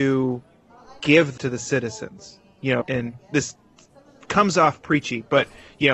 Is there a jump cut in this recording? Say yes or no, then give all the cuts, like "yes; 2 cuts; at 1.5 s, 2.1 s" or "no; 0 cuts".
yes; 2 cuts; at 1.4 s, 2.8 s